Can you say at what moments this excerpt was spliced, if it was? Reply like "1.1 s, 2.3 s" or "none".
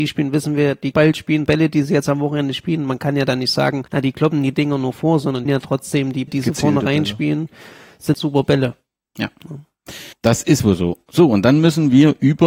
0.9 s, 1.5 s, 3.9 s, 5.5 s, 6.3 s, 8.1 s, 10.1 s